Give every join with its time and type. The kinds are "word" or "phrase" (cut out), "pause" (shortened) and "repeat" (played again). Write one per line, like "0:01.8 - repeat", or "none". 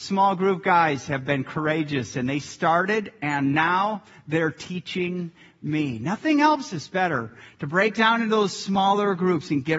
none